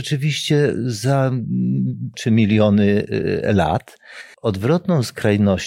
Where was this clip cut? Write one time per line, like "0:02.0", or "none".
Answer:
0:02.1
0:04.3